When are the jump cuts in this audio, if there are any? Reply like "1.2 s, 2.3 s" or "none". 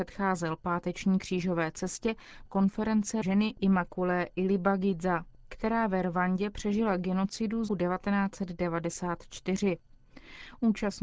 2.5 s, 3.2 s, 7.7 s